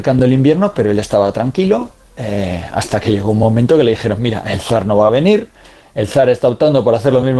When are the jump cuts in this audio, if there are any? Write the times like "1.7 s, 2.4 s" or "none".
none